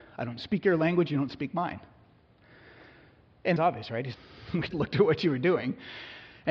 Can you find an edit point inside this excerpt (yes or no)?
yes